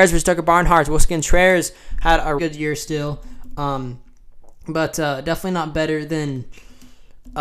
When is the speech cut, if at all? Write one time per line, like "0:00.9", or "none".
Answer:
0:02.4